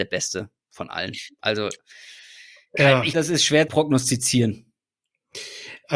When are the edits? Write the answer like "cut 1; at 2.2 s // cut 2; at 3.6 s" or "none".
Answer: cut 1; at 3.1 s // cut 2; at 3.7 s